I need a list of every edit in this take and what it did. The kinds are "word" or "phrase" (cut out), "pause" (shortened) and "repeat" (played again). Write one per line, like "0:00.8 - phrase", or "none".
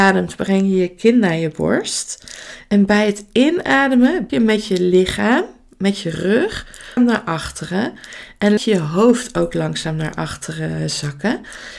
0:04.3 - word
0:07.0 - word
0:08.6 - word